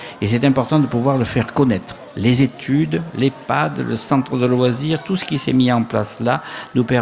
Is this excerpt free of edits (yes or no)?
yes